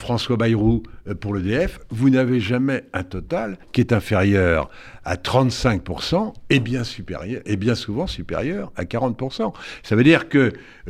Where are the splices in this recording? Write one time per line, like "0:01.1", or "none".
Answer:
0:03.6